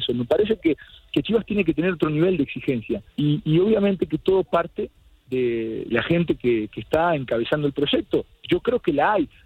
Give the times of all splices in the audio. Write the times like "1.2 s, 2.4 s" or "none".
3.1 s, 5.9 s